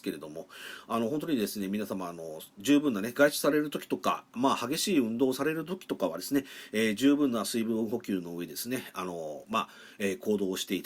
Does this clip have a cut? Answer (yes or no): no